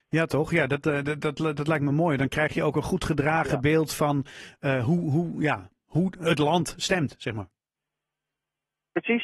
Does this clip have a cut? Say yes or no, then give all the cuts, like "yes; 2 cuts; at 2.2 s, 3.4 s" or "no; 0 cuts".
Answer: no; 0 cuts